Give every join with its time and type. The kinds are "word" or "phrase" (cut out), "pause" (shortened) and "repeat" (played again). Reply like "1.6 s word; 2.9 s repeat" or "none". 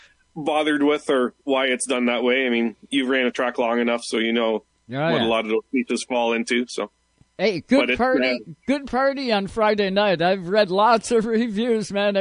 4.7 s pause